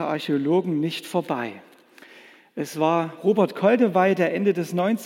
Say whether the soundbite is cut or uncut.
uncut